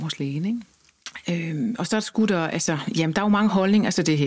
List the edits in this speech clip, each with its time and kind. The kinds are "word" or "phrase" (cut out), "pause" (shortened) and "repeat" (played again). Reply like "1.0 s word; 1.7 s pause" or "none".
none